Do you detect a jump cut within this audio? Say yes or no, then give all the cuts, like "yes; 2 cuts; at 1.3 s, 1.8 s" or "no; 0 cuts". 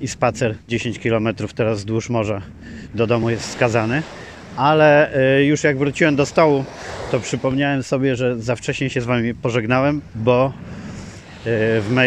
no; 0 cuts